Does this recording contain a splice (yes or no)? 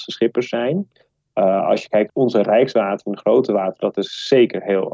no